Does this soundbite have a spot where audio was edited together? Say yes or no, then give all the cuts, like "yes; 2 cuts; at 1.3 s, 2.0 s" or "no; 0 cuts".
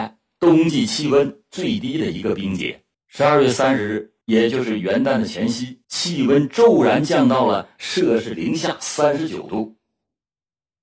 yes; 3 cuts; at 2.9 s, 4.2 s, 5.8 s